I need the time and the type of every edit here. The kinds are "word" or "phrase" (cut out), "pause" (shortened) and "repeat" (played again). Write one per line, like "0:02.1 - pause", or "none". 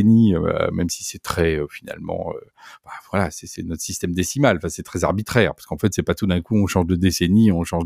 none